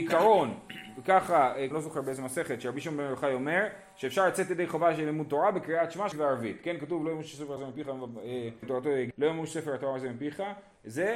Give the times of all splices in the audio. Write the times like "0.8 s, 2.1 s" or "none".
1.7 s, 6.1 s, 7.6 s, 8.6 s, 9.1 s